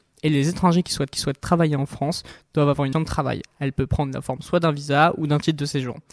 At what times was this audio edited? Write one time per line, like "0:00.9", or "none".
0:01.1
0:02.9